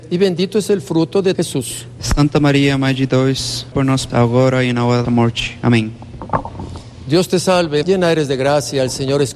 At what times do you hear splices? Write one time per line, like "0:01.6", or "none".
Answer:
0:01.3
0:03.7
0:04.1
0:05.0
0:07.8